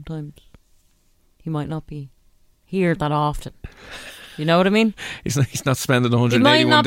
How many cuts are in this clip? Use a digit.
0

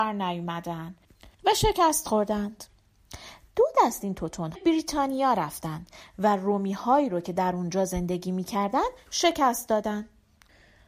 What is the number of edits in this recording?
3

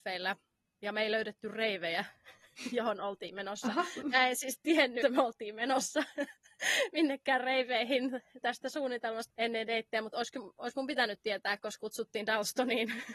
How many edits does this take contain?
4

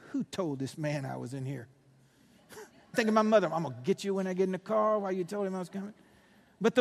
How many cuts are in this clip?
1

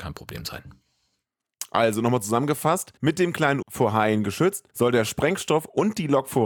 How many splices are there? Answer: 3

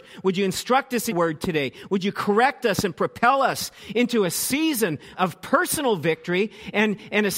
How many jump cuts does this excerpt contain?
2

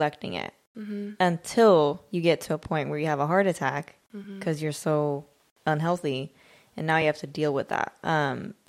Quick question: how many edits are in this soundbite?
0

